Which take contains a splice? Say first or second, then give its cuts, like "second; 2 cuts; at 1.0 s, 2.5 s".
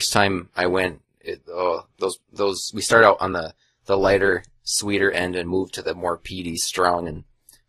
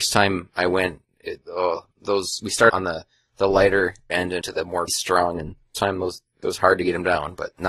second; 7 cuts; at 1.9 s, 2.7 s, 4.1 s, 4.4 s, 4.9 s, 5.7 s, 6.4 s